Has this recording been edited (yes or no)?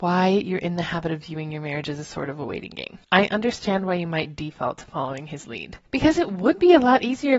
yes